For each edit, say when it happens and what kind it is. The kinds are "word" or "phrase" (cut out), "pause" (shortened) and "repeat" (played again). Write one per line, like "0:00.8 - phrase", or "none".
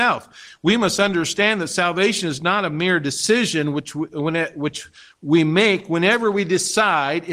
none